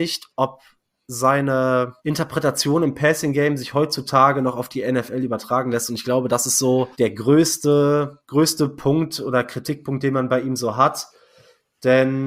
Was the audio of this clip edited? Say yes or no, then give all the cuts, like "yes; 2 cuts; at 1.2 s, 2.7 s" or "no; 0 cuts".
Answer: yes; 3 cuts; at 2.0 s, 6.9 s, 8.2 s